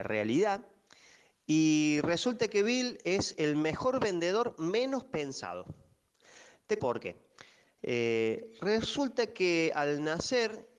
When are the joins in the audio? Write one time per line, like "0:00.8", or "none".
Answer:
0:06.8

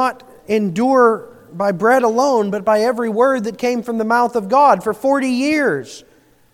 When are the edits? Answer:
none

